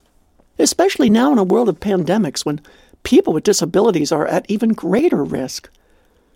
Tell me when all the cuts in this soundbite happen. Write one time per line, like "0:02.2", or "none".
none